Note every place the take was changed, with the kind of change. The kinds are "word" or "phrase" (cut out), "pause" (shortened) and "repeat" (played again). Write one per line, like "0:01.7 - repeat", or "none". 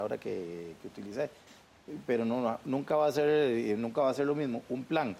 none